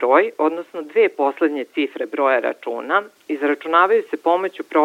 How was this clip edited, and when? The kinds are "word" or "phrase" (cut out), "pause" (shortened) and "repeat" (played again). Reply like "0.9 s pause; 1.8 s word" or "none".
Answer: none